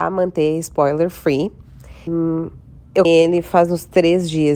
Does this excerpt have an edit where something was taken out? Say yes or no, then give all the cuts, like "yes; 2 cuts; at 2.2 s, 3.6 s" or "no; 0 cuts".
yes; 2 cuts; at 2.1 s, 3.0 s